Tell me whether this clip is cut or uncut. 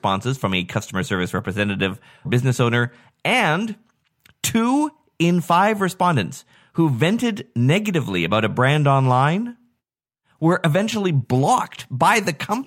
cut